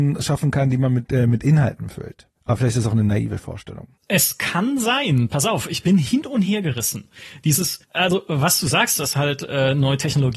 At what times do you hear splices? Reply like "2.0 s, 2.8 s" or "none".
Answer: 2.4 s, 4.0 s, 7.8 s